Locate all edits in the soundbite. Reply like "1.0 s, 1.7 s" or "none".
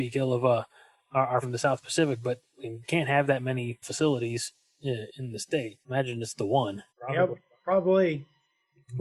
1.4 s, 2.8 s, 3.8 s, 5.8 s, 6.9 s